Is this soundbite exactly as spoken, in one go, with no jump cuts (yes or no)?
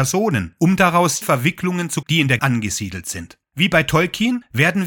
no